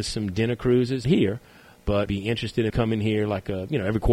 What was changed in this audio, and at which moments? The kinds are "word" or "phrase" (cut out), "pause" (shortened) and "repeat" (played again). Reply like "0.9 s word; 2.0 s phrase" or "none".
1.0 s word; 2.1 s word; 2.7 s word

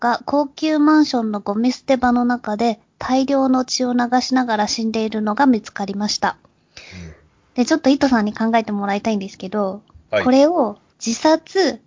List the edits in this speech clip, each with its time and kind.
none

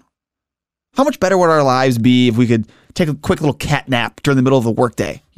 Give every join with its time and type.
none

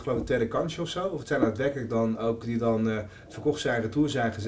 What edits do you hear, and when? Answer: 2.4 s phrase

